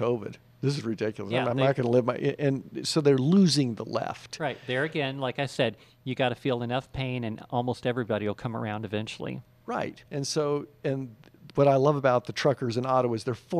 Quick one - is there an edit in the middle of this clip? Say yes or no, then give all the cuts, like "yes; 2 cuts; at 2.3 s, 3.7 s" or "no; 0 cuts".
yes; 1 cut; at 10.1 s